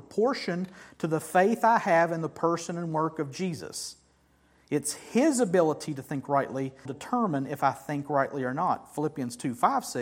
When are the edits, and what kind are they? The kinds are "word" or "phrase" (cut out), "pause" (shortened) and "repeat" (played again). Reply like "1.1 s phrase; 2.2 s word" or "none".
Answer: 6.8 s phrase